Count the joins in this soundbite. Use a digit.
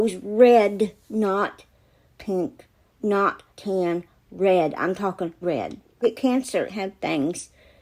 5